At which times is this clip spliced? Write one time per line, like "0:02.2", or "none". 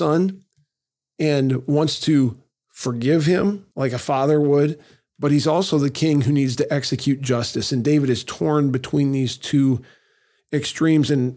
0:03.7